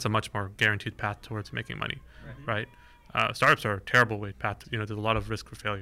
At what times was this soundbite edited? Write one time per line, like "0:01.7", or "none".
0:04.3
0:04.6